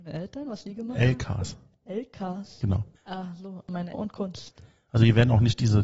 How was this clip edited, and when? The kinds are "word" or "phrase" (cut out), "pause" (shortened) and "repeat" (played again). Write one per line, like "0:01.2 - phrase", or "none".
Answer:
0:03.0 - pause
0:03.9 - phrase